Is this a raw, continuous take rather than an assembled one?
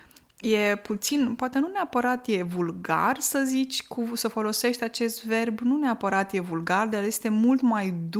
yes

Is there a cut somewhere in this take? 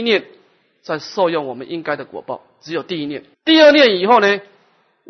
yes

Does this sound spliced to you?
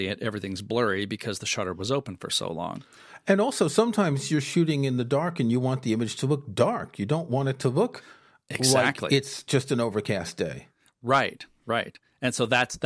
no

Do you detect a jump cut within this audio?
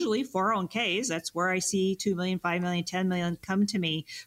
no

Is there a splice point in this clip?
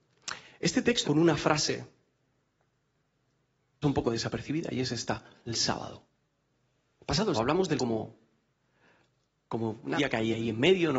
yes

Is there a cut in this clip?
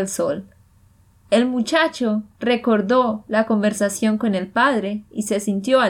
no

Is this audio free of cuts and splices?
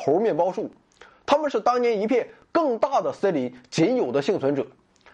yes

